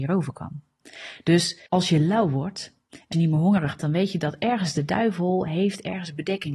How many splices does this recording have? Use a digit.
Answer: 3